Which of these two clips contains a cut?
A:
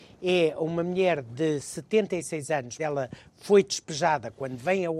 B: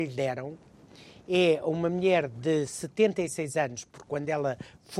A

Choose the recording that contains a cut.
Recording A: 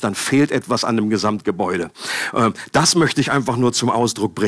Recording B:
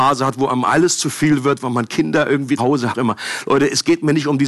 B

